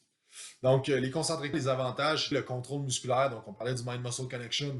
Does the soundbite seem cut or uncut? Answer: cut